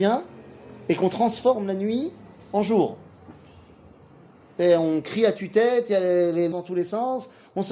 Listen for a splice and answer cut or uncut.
cut